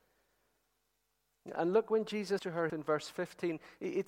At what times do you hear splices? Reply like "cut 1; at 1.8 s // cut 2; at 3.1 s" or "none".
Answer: cut 1; at 2.4 s // cut 2; at 2.7 s